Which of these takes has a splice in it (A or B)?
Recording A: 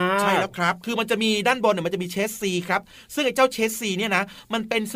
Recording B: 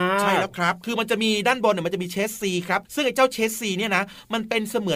B